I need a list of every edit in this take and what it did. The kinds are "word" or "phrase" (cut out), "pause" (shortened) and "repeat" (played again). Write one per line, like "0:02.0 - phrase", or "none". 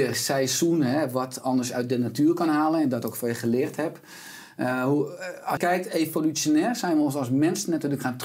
0:05.6 - word